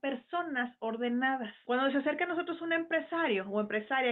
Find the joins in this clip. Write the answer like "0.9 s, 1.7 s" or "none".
1.6 s